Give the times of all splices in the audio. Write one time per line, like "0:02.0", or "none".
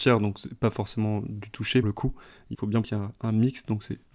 0:01.8
0:02.5
0:02.8